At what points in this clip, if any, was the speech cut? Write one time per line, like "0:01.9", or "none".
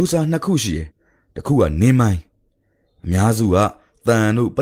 0:00.9